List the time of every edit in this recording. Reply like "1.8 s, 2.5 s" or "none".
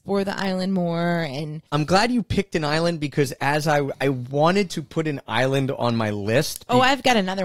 1.7 s, 3.9 s